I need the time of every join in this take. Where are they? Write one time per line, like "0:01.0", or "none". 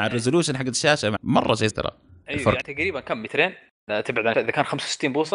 0:01.2
0:01.7
0:02.6
0:04.3